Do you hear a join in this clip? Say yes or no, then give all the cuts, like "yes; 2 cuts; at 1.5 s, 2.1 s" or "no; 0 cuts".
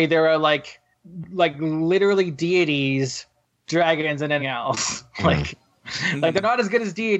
yes; 1 cut; at 4.4 s